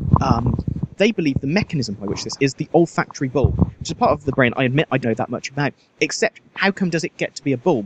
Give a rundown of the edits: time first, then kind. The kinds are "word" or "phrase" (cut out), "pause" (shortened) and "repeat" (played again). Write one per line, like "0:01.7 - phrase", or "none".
0:00.9 - phrase
0:02.4 - phrase
0:05.0 - word

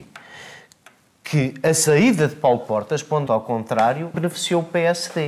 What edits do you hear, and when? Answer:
0:03.3 - phrase
0:04.1 - word

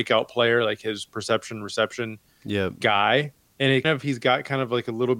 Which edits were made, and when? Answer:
0:03.8 - word

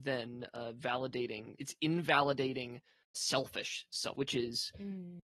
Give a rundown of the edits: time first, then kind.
0:01.6 - word
0:03.1 - word
0:04.1 - word

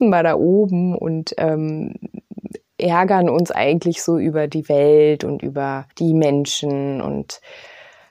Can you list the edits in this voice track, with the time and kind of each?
0:05.9 - pause

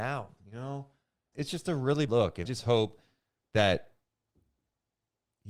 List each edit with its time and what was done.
0:01.3 - word
0:02.1 - word
0:02.4 - word

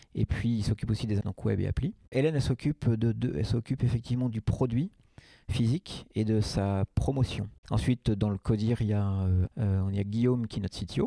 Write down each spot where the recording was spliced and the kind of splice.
0:01.2 - word
0:07.6 - pause
0:09.5 - word

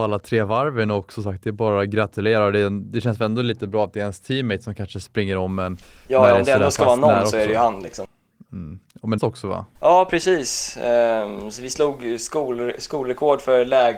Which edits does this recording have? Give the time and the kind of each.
0:05.8 - pause
0:09.2 - phrase
0:09.8 - pause

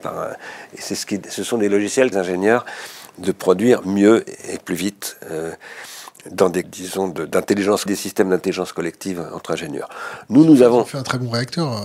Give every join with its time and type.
0:02.1 - phrase
0:06.6 - phrase
0:07.9 - phrase

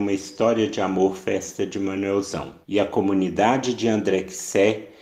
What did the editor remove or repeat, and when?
0:02.6 - pause

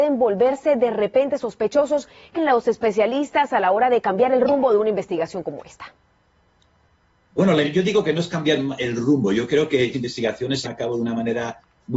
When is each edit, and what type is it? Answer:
0:02.4 - word
0:07.6 - word
0:09.9 - word
0:10.6 - word

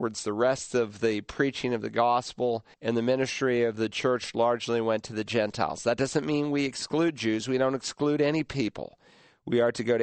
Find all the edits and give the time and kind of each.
0:02.7 - pause

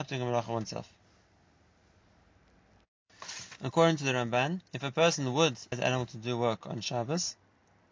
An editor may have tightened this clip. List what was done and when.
0:04.7 - pause
0:05.7 - word

